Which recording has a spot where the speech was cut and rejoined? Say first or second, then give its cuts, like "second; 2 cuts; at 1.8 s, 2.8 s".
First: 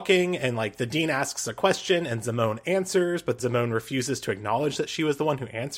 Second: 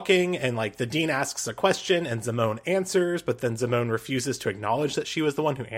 first; 1 cut; at 3.4 s